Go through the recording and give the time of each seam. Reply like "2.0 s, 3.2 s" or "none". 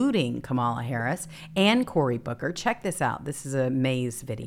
none